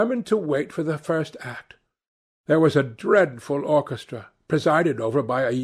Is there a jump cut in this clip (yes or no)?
no